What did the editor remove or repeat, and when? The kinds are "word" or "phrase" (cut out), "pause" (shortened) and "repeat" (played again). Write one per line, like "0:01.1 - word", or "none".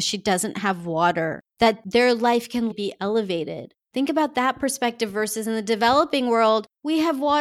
0:02.7 - word